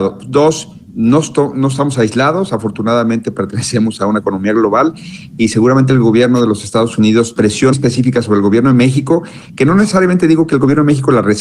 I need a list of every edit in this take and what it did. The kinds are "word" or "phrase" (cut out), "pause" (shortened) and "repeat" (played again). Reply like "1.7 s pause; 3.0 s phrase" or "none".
7.4 s phrase; 7.7 s word